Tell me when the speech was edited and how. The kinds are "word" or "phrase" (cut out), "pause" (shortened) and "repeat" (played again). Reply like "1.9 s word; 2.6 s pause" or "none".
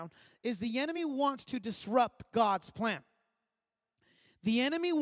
none